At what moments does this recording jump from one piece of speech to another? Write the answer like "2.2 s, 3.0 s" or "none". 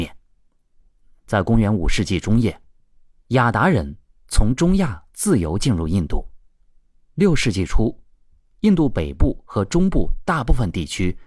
none